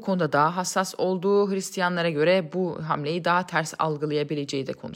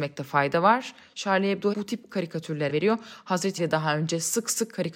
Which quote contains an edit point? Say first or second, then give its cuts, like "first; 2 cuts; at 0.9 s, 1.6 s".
second; 4 cuts; at 1.7 s, 2.1 s, 2.7 s, 3.6 s